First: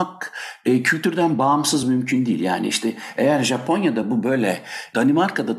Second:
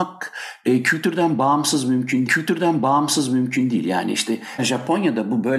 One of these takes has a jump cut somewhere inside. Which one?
second; 2 cuts; at 2.3 s, 4.6 s

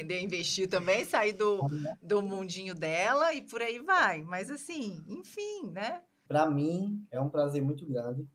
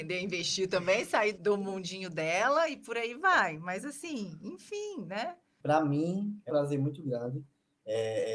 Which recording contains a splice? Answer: second; 2 cuts; at 1.3 s, 6.5 s

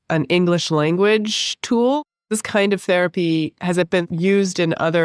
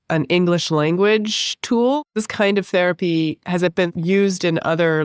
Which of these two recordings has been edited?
second; 1 cut; at 2.1 s

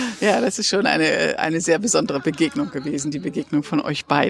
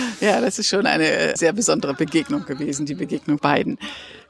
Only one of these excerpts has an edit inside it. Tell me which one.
second; 2 cuts; at 1.4 s, 3.4 s

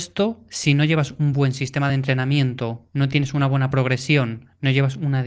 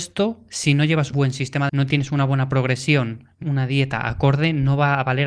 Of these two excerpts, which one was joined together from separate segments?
second; 3 cuts; at 1.1 s, 1.7 s, 3.4 s

